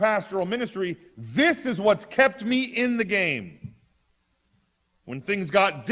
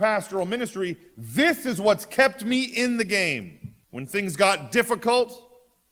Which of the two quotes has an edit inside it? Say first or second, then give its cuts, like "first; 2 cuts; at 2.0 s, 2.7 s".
second; 1 cut; at 3.8 s